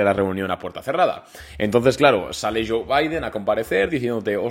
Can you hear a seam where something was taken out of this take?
no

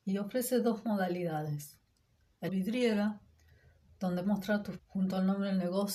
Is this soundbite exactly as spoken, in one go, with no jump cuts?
no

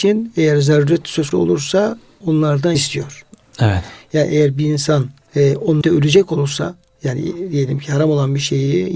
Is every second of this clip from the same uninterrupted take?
no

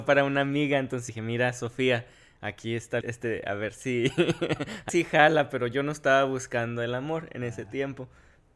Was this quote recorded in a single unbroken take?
no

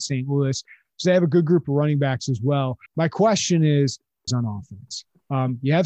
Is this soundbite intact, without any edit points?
no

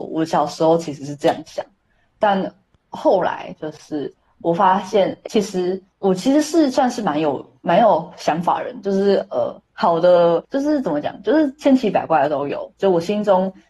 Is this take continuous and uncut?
no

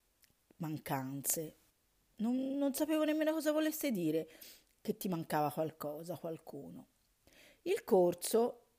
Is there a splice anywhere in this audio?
no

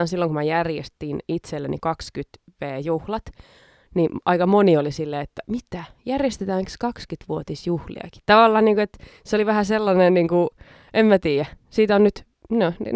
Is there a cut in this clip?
no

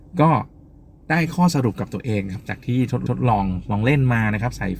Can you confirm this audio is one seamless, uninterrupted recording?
no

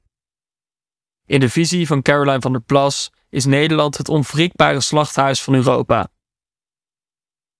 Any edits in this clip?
no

